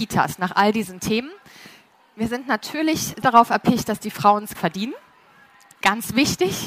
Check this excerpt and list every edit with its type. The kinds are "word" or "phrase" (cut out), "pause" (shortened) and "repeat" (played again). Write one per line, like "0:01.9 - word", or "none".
0:03.2 - word
0:04.5 - word